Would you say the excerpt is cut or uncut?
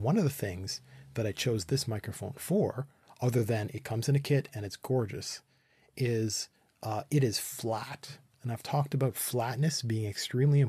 uncut